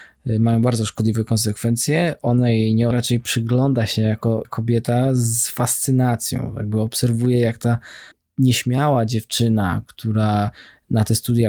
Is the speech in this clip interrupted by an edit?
yes; 3 cuts; at 2.9 s, 4.4 s, 8.1 s

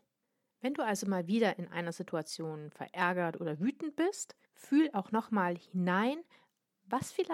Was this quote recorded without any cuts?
no; 1 cut; at 4.4 s

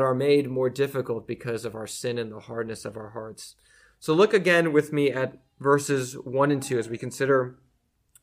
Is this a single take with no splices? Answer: yes; 0 cuts

